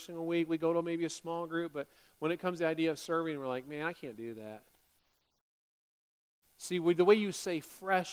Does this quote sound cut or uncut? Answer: uncut